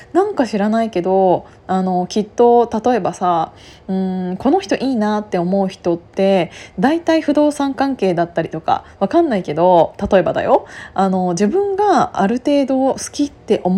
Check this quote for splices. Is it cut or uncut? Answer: uncut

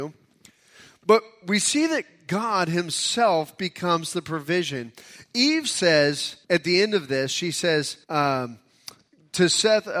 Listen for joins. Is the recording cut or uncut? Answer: cut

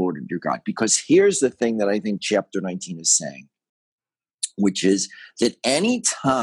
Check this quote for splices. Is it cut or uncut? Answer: uncut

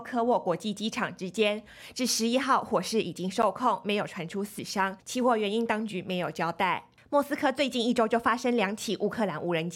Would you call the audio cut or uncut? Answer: cut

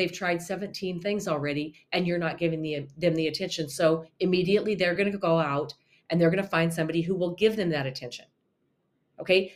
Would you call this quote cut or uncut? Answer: uncut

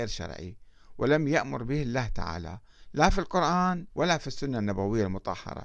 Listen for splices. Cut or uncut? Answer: cut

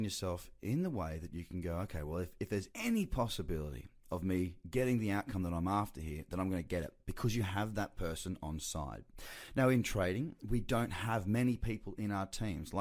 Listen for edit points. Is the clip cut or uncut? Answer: cut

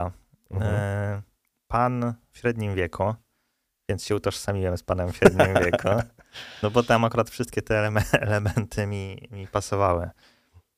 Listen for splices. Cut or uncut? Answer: uncut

